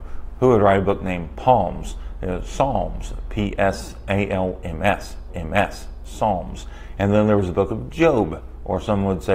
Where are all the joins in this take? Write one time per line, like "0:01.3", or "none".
0:05.3